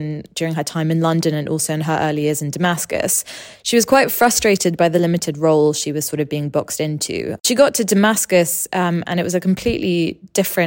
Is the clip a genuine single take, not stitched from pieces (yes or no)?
yes